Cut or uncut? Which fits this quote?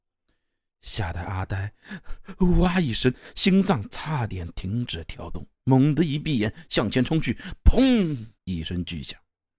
cut